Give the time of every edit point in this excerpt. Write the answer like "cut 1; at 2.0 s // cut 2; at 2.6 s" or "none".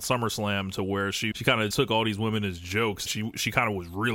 cut 1; at 1.3 s // cut 2; at 1.7 s // cut 3; at 3.1 s